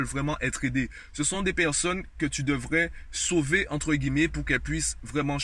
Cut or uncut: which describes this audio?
uncut